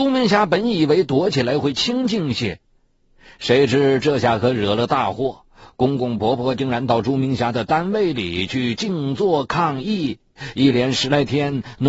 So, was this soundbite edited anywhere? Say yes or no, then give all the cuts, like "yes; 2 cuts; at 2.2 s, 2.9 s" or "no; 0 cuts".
no; 0 cuts